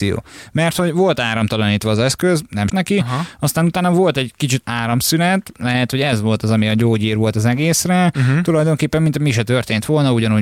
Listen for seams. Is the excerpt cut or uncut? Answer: cut